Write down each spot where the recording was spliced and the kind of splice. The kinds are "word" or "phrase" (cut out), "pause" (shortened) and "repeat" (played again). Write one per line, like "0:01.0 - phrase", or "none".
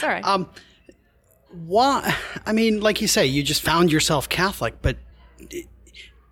none